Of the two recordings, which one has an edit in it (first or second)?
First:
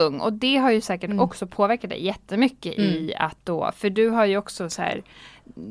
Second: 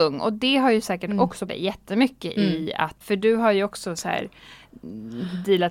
second